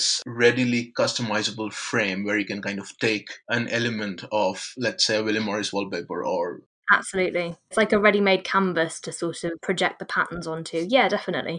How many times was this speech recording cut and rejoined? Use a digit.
2